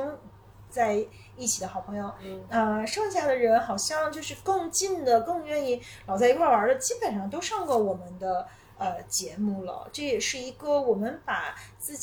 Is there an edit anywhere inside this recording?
no; 0 cuts

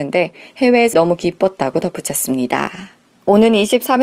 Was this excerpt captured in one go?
no; 2 cuts; at 0.9 s, 3.1 s

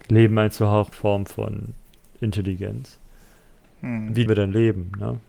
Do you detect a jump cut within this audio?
yes; 2 cuts; at 0.9 s, 4.3 s

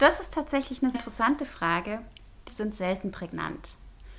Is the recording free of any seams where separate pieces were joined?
no; 2 cuts; at 0.9 s, 2.5 s

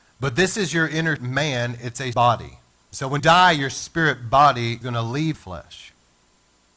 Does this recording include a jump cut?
yes; 6 cuts; at 1.2 s, 2.1 s, 2.7 s, 3.2 s, 4.8 s, 5.3 s

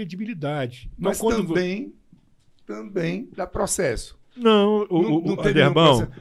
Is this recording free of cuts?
yes; 0 cuts

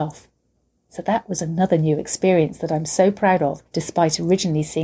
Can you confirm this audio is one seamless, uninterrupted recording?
no; 1 cut; at 3.7 s

